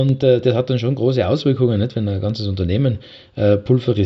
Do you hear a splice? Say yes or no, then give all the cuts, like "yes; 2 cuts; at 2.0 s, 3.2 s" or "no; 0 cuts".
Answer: no; 0 cuts